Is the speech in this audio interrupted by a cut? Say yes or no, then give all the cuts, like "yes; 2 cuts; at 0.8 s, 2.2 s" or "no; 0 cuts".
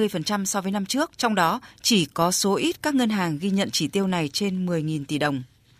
yes; 1 cut; at 1.1 s